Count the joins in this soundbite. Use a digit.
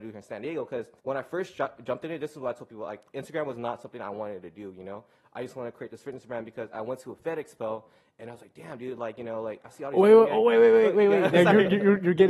1